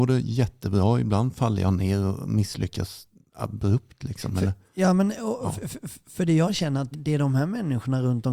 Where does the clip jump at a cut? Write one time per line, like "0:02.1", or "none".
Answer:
0:06.9